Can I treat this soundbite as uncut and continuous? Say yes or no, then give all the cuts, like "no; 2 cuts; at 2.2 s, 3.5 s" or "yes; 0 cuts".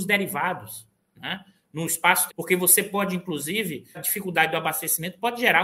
no; 2 cuts; at 2.3 s, 3.9 s